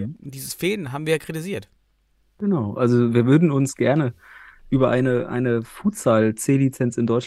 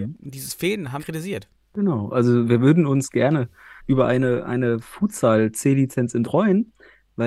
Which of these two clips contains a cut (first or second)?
second